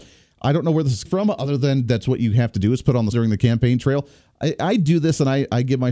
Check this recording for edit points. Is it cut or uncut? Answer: cut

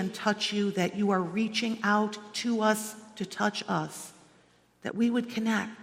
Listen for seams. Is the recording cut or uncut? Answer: uncut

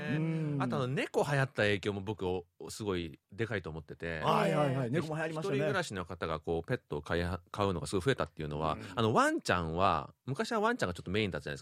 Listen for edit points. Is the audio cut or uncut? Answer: cut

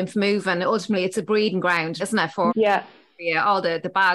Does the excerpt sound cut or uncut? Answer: cut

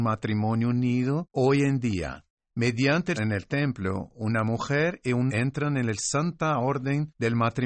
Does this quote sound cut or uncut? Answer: cut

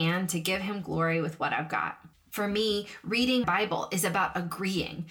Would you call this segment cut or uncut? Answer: cut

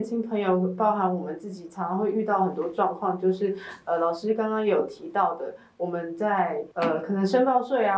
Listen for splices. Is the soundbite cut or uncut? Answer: cut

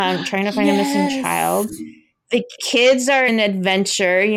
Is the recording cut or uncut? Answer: cut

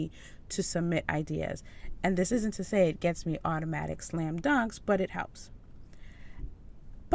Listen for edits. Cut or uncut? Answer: uncut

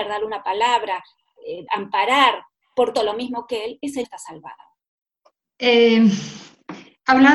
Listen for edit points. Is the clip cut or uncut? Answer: cut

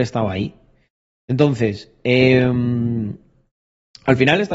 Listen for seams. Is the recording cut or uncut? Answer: uncut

